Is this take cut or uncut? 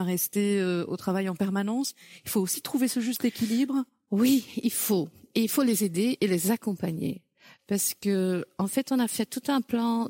uncut